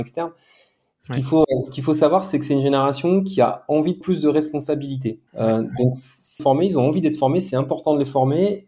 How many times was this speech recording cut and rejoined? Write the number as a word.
three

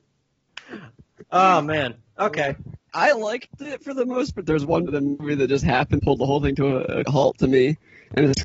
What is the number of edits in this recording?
five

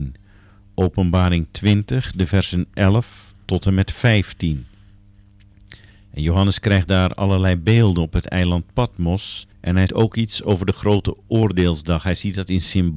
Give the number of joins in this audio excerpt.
three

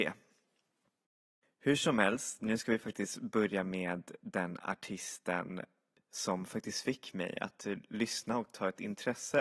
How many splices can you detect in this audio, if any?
zero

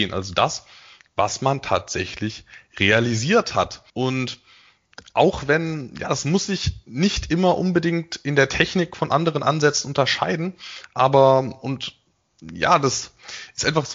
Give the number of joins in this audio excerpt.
one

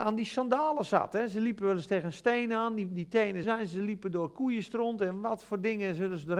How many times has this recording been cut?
one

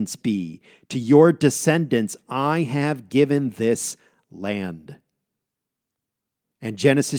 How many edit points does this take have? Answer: zero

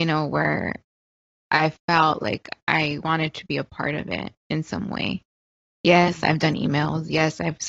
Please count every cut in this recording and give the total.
one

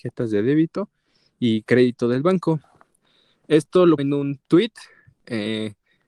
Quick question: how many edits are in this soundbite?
one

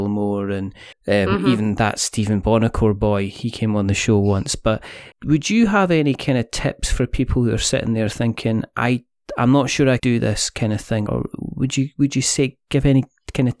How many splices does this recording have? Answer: four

